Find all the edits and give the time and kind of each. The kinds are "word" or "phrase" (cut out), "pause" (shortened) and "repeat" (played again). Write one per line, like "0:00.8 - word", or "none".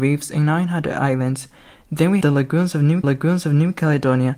0:02.2 - word
0:03.0 - repeat

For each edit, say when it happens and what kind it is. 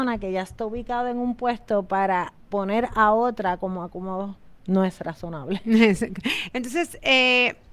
none

